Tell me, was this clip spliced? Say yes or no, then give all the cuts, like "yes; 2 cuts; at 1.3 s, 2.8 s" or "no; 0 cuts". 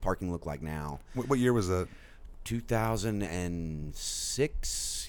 no; 0 cuts